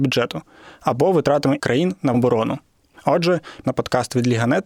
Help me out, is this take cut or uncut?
cut